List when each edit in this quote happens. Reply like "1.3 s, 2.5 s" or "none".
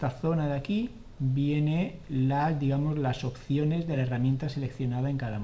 none